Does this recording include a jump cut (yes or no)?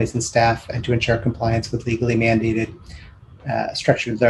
no